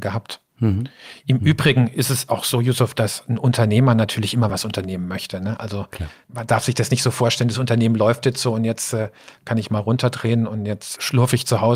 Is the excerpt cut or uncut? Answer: uncut